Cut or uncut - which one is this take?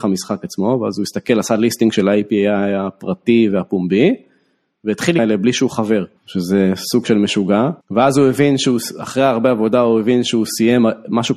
cut